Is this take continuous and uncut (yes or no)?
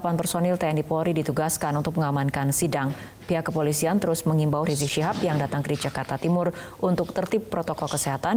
no